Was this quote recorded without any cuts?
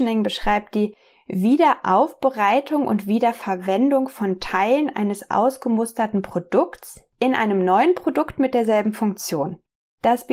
yes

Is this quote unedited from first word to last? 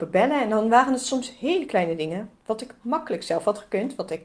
yes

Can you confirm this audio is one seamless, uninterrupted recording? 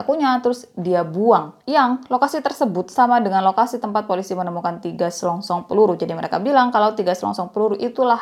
yes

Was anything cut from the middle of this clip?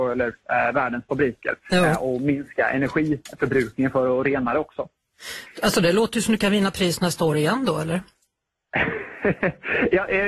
no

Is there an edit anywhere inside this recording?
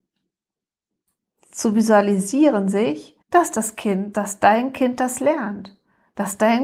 yes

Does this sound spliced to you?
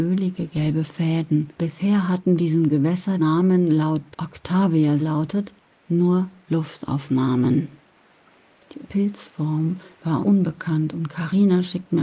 yes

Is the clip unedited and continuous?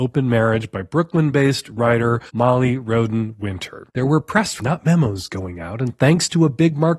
no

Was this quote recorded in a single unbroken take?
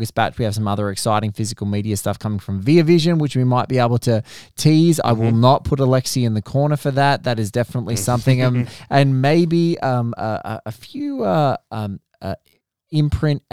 yes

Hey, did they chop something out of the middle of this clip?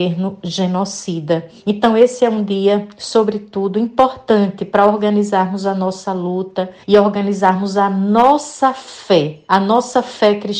yes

